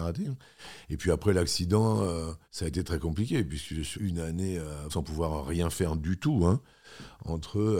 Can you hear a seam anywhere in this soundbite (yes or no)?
yes